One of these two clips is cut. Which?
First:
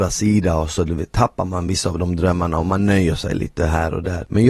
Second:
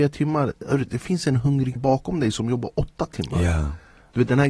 second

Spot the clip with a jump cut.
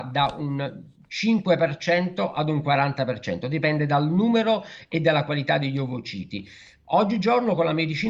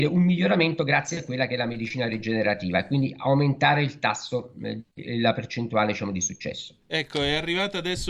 second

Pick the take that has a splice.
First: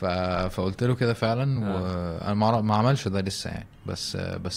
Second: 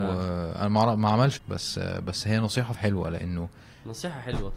second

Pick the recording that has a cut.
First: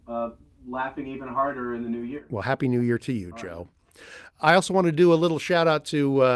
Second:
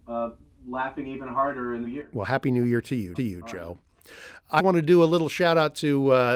second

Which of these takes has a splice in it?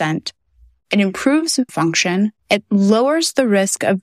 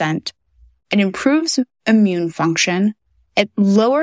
first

